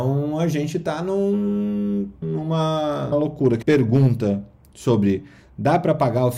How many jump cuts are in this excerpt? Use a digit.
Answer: 3